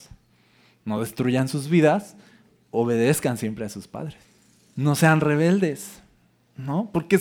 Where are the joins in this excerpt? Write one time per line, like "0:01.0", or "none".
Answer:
none